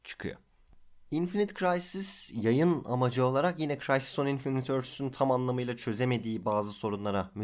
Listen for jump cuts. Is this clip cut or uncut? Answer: uncut